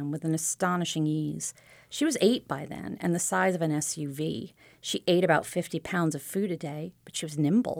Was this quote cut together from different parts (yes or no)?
no